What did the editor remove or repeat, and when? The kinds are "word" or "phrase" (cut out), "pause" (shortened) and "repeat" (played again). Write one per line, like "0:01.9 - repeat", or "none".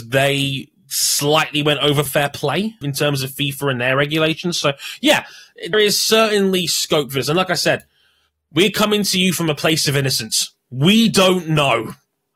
0:02.1 - word
0:02.8 - word
0:05.7 - word

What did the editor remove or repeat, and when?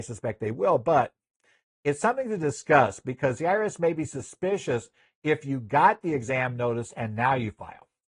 none

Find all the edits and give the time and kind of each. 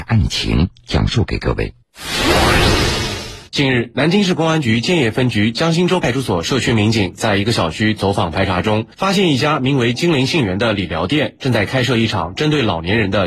0:03.5 - pause
0:08.9 - pause

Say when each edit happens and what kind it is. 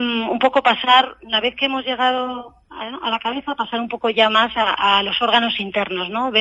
none

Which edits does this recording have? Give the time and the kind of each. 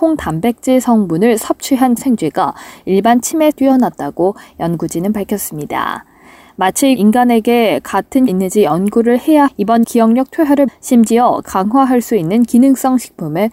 0:02.0 - word
0:03.5 - word
0:07.0 - word
0:08.3 - word
0:09.5 - word
0:09.8 - word
0:10.7 - word
0:11.4 - word

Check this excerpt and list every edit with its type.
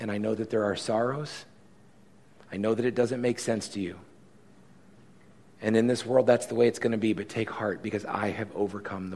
none

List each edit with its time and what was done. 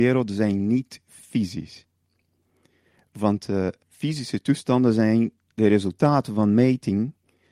0:03.8 - word

